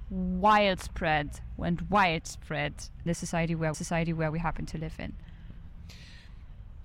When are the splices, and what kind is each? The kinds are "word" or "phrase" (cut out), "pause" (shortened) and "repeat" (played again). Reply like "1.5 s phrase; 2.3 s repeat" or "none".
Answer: 3.1 s phrase; 3.7 s repeat